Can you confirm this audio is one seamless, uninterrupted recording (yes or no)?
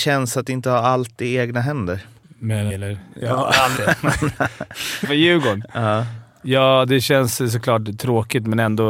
no